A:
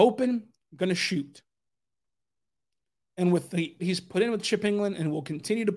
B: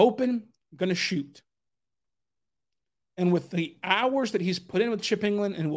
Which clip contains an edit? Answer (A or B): A